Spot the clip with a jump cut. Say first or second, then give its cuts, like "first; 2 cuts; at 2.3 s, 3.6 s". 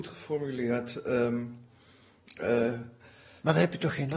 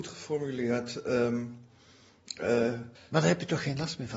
second; 1 cut; at 3.0 s